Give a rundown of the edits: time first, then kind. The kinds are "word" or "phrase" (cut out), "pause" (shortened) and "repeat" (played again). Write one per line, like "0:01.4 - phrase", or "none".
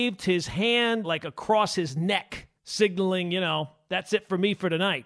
0:01.0 - word
0:02.6 - pause